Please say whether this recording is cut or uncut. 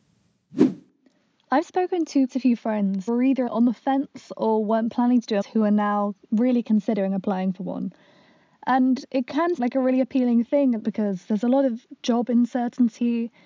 cut